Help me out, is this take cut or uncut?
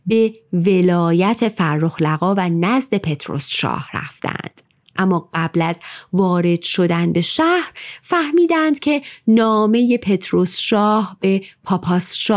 uncut